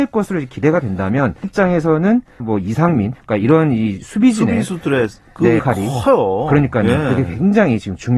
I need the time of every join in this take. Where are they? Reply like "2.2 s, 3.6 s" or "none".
1.4 s, 2.4 s, 3.1 s, 5.6 s